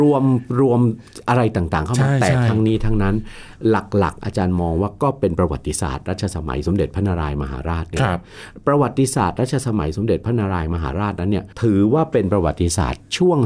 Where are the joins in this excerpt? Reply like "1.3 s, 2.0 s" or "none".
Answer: 11.5 s